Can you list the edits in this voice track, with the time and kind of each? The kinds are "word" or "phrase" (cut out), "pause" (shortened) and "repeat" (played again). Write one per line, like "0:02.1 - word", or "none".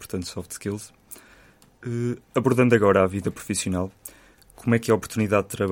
none